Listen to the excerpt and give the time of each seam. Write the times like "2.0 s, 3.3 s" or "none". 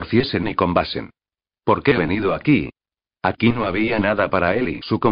2.0 s